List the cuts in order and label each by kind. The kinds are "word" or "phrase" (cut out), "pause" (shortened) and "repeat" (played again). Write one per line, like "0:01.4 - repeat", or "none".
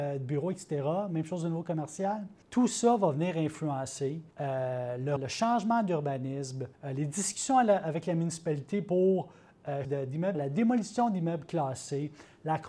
0:02.4 - pause
0:04.3 - pause
0:05.2 - word
0:06.7 - pause
0:09.8 - phrase
0:10.3 - word